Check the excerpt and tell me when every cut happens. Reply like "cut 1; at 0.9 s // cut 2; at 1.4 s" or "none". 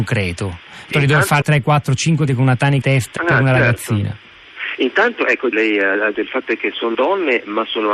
cut 1; at 0.9 s // cut 2; at 1.4 s // cut 3; at 2.3 s // cut 4; at 2.8 s // cut 5; at 3.2 s // cut 6; at 5.5 s // cut 7; at 6.1 s // cut 8; at 6.9 s